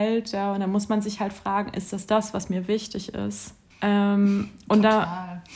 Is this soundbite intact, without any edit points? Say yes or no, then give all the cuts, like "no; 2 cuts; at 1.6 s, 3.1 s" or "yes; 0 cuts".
no; 1 cut; at 3.7 s